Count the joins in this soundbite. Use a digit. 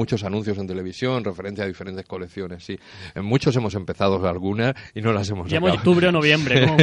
1